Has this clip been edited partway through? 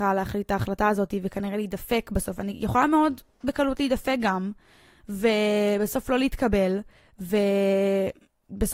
no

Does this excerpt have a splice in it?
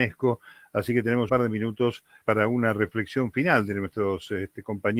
yes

